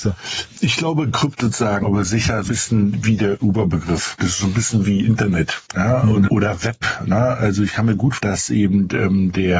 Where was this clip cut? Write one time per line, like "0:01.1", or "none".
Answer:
0:01.4
0:01.8
0:02.5
0:05.7
0:06.3
0:08.2